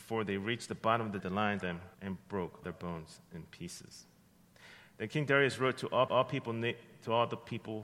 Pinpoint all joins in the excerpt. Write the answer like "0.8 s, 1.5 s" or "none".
1.2 s, 1.6 s, 1.9 s, 2.6 s, 6.1 s